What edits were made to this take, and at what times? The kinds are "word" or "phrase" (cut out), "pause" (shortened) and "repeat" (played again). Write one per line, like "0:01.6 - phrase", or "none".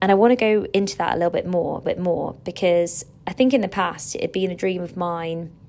0:01.8 - repeat